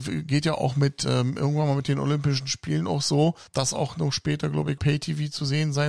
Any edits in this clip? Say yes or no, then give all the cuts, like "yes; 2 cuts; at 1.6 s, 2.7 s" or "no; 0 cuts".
yes; 2 cuts; at 3.5 s, 4.8 s